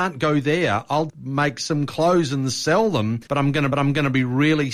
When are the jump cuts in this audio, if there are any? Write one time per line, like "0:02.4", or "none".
0:01.1
0:03.3
0:03.7